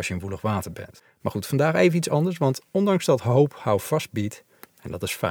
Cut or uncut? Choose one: uncut